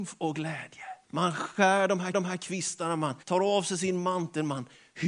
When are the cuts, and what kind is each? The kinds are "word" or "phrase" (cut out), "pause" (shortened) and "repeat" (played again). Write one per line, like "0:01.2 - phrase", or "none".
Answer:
0:01.0 - pause
0:02.1 - repeat
0:03.2 - pause